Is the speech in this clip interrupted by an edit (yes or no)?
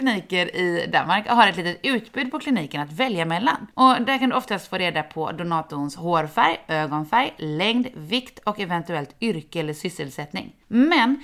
no